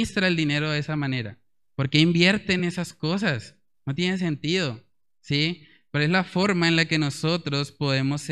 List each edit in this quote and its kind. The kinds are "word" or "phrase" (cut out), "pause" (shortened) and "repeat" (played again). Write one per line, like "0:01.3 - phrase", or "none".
none